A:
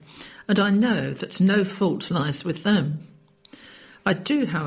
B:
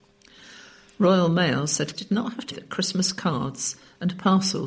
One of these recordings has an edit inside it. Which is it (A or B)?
B